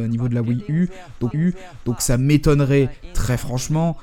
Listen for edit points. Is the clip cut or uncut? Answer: cut